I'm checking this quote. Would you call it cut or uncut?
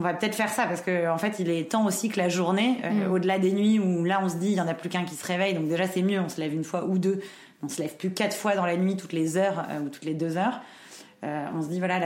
uncut